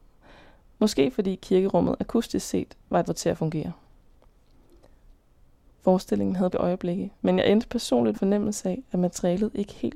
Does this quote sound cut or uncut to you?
cut